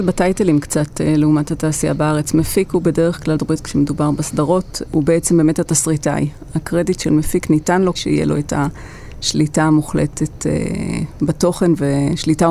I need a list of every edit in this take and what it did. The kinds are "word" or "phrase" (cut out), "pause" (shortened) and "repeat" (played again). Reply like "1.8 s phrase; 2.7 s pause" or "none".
3.4 s word; 7.9 s word

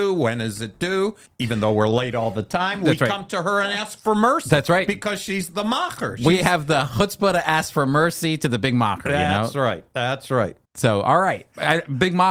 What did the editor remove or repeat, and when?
1.3 s pause; 10.6 s pause

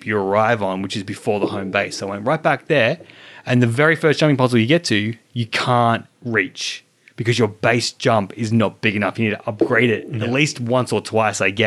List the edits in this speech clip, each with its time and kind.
none

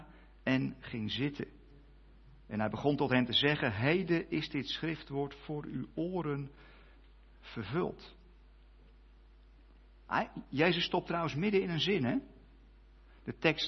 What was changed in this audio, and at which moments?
none

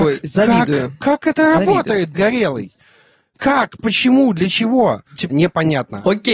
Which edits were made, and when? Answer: 2.1 s word; 5.3 s word

